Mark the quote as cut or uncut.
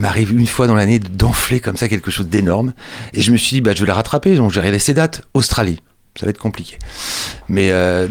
uncut